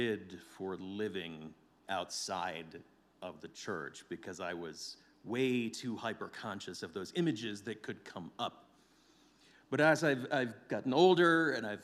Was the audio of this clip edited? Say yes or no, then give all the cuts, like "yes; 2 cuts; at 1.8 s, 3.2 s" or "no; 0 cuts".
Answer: no; 0 cuts